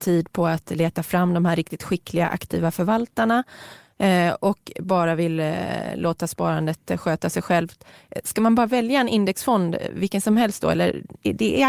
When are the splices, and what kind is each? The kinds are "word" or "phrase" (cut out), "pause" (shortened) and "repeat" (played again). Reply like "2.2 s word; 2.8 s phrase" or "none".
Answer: none